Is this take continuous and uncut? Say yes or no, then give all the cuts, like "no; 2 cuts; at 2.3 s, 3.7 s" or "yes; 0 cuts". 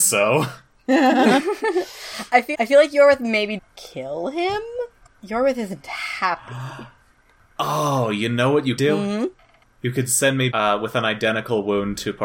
no; 5 cuts; at 2.5 s, 3.6 s, 5.1 s, 8.8 s, 10.5 s